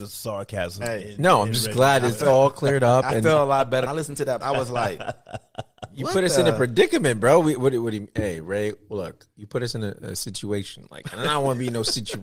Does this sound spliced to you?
yes; 2 cuts; at 3.9 s, 4.4 s

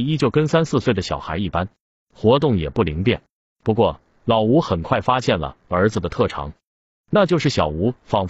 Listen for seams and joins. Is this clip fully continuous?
yes; 0 cuts

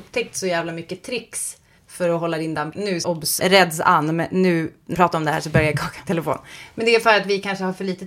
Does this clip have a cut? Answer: yes; 6 cuts; at 1.8 s, 2.7 s, 3.0 s, 3.4 s, 4.9 s, 6.1 s

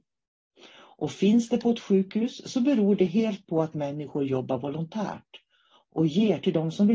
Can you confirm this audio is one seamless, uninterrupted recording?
yes; 0 cuts

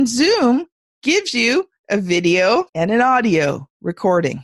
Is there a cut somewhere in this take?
yes; 1 cut; at 2.7 s

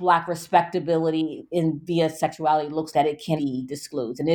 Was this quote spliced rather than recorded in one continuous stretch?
yes; 2 cuts; at 2.9 s, 3.4 s

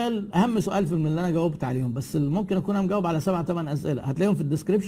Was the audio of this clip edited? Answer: no; 0 cuts

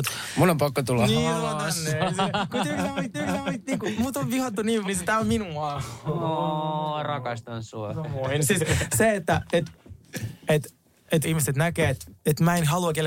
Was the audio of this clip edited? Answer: yes; 3 cuts; at 3.1 s, 4.8 s, 11.2 s

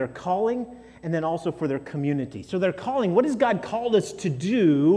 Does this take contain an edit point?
no; 0 cuts

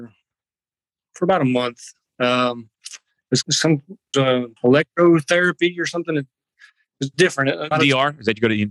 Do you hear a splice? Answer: yes; 6 cuts; at 2.7 s, 3.4 s, 4.1 s, 4.6 s, 7.1 s, 7.7 s

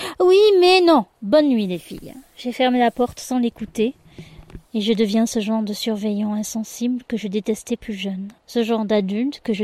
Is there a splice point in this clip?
yes; 3 cuts; at 1.1 s, 4.6 s, 8.4 s

